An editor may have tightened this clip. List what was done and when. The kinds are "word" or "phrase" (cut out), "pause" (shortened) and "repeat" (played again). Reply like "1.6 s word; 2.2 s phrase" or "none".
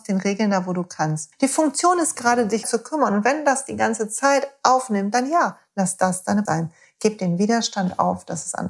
1.3 s pause; 2.6 s phrase; 6.5 s word